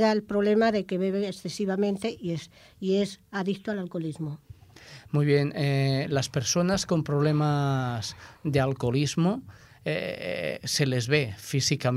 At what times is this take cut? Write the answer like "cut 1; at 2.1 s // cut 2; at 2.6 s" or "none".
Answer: none